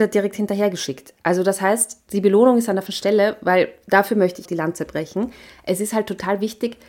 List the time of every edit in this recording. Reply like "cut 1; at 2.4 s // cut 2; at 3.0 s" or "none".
cut 1; at 2.1 s // cut 2; at 2.9 s // cut 3; at 4.5 s